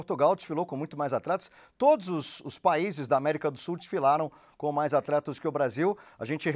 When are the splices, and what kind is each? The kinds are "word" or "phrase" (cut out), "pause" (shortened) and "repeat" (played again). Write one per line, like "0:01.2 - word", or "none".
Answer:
none